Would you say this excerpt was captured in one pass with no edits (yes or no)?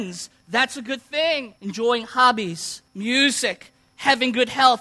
no